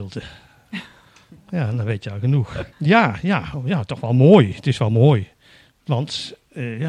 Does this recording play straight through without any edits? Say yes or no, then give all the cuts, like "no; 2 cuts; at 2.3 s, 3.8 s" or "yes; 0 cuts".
no; 1 cut; at 2.7 s